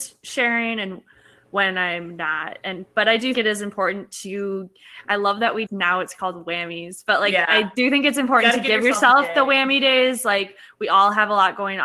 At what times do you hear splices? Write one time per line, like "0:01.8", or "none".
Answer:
0:03.3
0:05.7

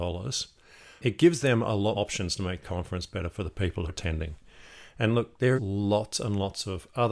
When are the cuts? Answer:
0:01.9
0:02.6
0:03.9
0:05.6

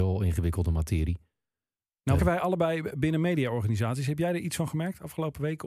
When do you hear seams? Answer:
0:02.2

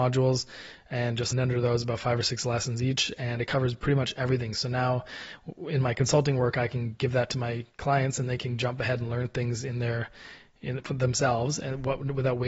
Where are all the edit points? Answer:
0:01.3

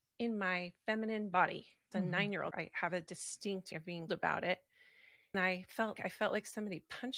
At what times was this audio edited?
0:01.9
0:02.5
0:03.7
0:04.1
0:05.3
0:06.0

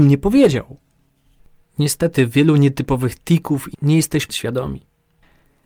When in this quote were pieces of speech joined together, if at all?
0:03.7
0:04.3

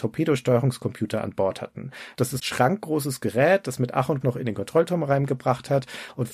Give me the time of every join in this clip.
0:02.4
0:04.2

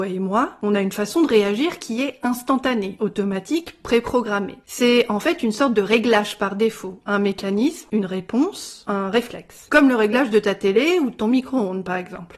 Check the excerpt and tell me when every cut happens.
none

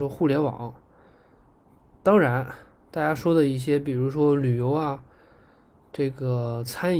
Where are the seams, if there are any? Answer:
none

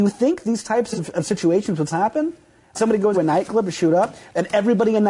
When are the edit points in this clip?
0:01.9
0:02.7
0:03.1

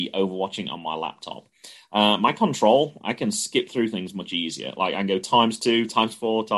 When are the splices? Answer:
none

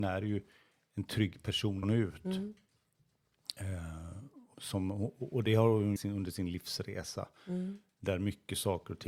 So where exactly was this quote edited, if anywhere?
0:01.8
0:04.5
0:06.0

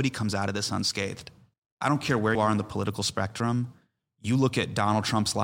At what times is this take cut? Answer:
0:01.5
0:02.3

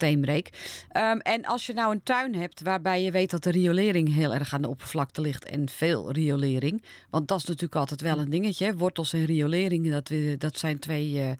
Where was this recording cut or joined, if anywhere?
none

